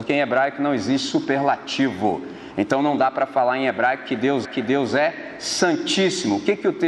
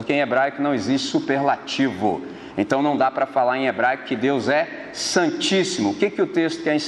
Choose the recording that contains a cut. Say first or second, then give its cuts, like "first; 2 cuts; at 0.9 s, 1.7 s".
first; 1 cut; at 4.4 s